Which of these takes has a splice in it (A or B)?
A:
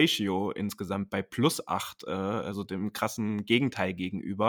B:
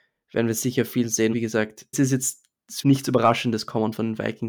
B